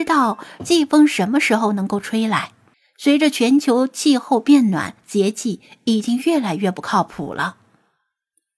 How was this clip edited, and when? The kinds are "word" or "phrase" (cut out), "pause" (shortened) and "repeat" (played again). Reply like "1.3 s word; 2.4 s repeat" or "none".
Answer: 2.7 s pause; 5.0 s pause